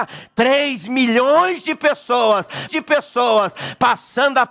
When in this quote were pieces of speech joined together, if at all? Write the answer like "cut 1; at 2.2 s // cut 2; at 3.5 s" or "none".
cut 1; at 2.7 s

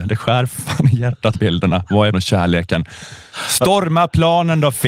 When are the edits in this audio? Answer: cut 1; at 1.3 s // cut 2; at 2.1 s

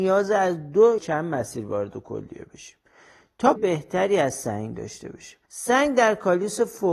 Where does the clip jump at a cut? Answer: cut 1; at 1.0 s // cut 2; at 3.6 s // cut 3; at 5.5 s

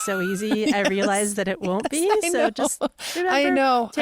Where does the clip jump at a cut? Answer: none

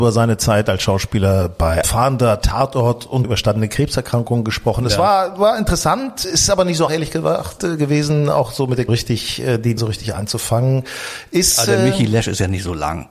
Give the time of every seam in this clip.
cut 1; at 1.8 s // cut 2; at 3.2 s // cut 3; at 6.2 s // cut 4; at 6.9 s // cut 5; at 8.9 s // cut 6; at 9.8 s

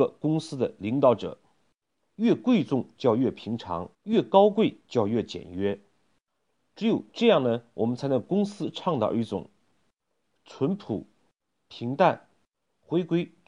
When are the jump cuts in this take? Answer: cut 1; at 3.9 s

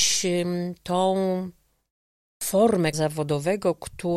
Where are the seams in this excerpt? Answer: cut 1; at 2.9 s

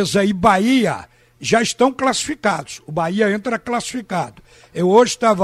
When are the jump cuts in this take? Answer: none

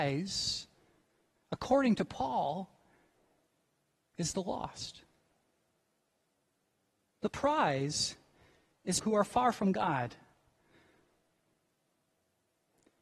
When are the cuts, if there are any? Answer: cut 1; at 9.0 s

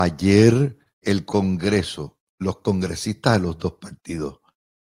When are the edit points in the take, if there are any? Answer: cut 1; at 1.0 s

